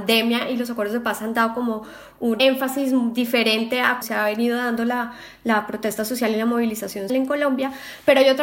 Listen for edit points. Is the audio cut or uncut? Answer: cut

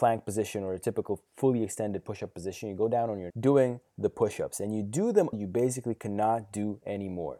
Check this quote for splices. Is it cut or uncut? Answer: cut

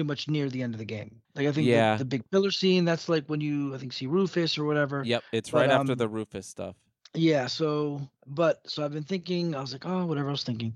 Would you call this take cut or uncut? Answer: cut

